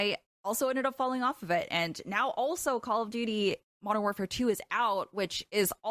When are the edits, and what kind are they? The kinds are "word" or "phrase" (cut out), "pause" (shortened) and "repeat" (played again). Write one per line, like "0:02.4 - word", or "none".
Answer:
none